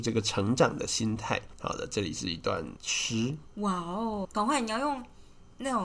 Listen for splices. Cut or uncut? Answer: cut